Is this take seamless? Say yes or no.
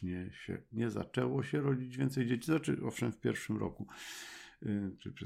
yes